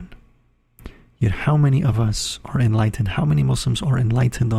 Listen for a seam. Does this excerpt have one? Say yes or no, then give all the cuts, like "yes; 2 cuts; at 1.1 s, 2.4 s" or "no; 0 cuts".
no; 0 cuts